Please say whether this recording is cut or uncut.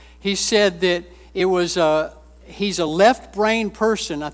uncut